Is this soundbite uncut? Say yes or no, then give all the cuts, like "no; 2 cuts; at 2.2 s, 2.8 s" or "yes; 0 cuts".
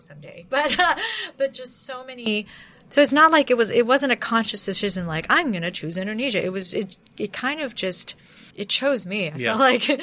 no; 1 cut; at 8.5 s